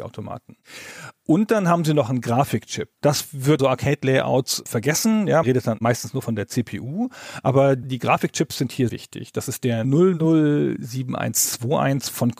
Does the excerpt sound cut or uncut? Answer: cut